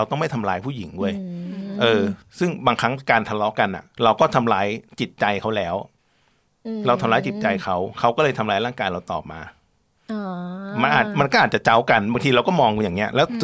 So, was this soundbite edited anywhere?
yes; 1 cut; at 3.9 s

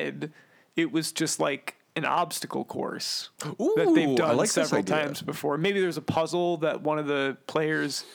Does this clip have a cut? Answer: yes; 1 cut; at 3.4 s

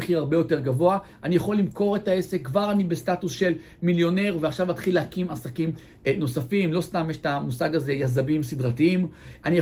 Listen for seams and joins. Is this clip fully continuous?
yes; 0 cuts

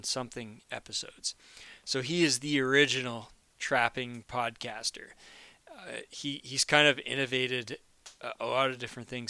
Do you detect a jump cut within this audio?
no; 0 cuts

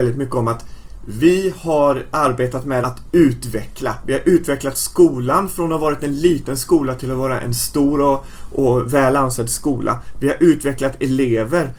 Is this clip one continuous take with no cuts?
no; 1 cut; at 2.8 s

